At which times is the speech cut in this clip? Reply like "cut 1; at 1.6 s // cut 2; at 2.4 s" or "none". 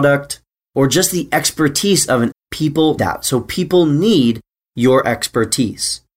cut 1; at 2.3 s // cut 2; at 3.0 s